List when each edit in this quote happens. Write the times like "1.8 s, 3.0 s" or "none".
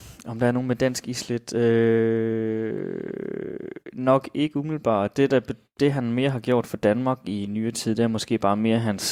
none